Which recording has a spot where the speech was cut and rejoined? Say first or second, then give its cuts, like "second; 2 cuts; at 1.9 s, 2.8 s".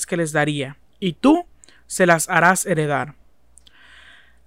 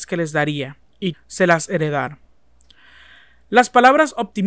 second; 2 cuts; at 1.1 s, 1.7 s